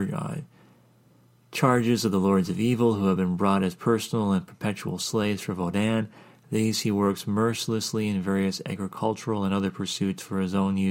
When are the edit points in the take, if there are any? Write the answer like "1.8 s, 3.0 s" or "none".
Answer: none